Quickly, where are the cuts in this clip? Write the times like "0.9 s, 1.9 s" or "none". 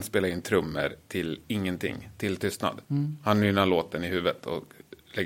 2.8 s